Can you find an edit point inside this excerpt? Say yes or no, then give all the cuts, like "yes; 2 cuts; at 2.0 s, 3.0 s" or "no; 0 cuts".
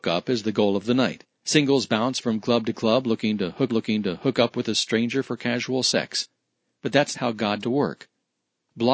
yes; 3 cuts; at 3.7 s, 7.1 s, 7.6 s